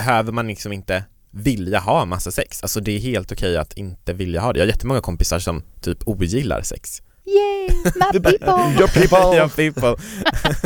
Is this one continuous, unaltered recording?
yes; 0 cuts

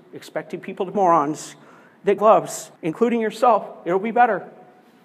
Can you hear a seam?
yes; 3 cuts; at 0.9 s, 2.2 s, 2.8 s

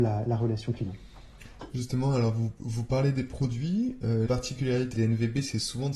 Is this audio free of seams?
no; 2 cuts; at 4.3 s, 4.9 s

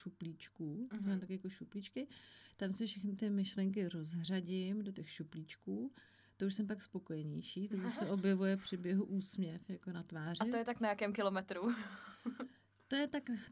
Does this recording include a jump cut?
no; 0 cuts

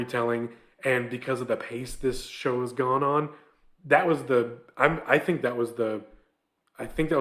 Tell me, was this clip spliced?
no; 0 cuts

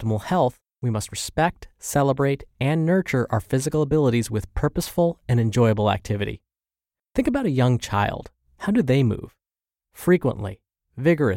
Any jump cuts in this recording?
no; 0 cuts

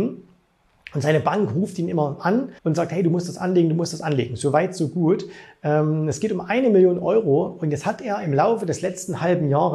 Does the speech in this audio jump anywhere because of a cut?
yes; 1 cut; at 2.6 s

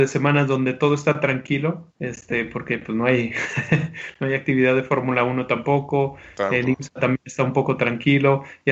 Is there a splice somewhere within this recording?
yes; 1 cut; at 1.9 s

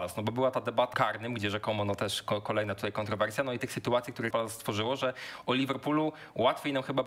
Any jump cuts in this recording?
yes; 3 cuts; at 0.9 s, 3.6 s, 4.3 s

